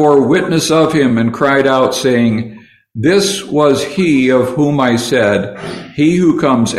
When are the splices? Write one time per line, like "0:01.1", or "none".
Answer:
none